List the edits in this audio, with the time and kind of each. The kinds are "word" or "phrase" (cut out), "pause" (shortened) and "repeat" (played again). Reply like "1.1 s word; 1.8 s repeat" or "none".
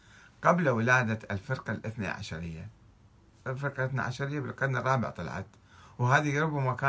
none